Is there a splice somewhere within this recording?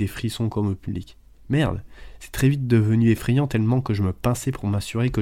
no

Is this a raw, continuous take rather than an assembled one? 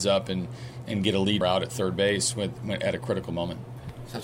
no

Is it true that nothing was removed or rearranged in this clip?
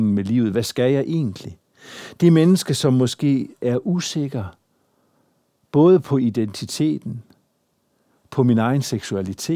yes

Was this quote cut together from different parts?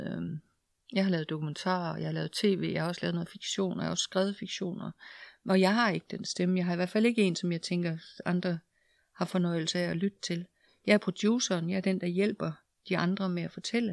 no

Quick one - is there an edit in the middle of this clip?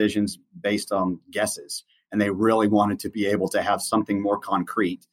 no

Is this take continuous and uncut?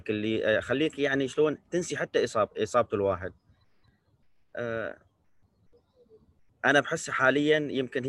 yes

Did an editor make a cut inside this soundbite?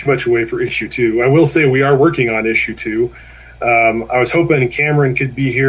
no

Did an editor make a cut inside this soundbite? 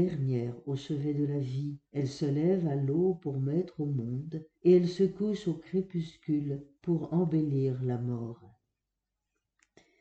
yes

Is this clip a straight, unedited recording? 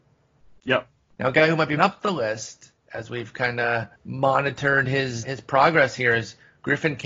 no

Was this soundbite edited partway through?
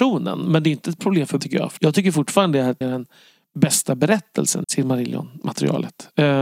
yes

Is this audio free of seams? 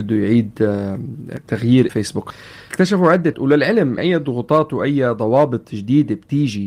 no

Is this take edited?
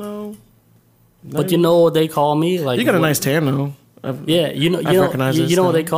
no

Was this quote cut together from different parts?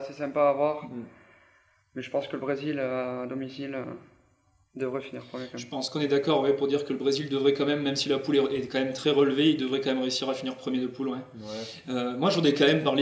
no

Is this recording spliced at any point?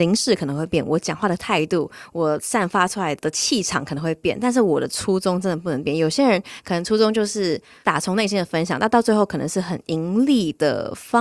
no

